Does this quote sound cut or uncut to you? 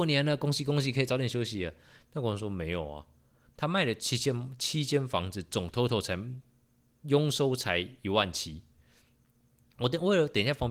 uncut